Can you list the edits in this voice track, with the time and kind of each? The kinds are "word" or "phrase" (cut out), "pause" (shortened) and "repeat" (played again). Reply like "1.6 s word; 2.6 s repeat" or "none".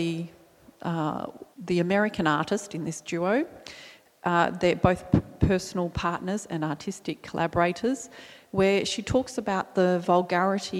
1.5 s pause